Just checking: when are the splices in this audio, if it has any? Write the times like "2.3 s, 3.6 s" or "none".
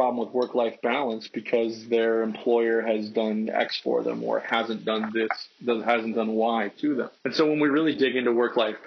7.2 s

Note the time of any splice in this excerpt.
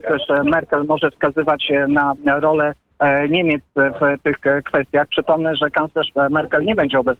none

